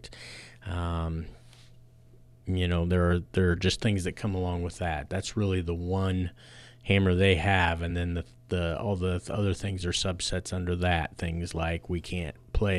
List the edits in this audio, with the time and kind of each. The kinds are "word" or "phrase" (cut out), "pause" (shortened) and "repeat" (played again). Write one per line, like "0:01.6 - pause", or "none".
none